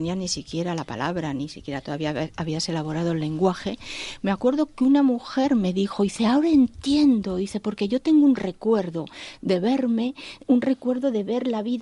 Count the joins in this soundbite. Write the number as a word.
zero